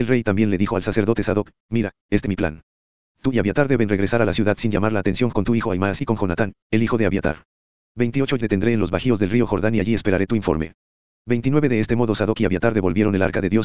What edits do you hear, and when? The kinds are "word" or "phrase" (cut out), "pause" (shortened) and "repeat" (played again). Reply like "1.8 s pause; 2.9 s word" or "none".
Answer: 2.3 s word; 5.3 s word; 8.4 s word